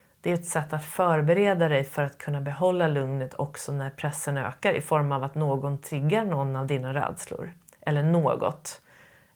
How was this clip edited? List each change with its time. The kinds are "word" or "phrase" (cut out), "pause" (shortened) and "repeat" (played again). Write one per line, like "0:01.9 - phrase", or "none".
none